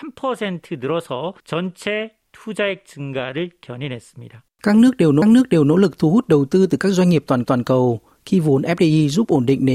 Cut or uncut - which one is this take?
cut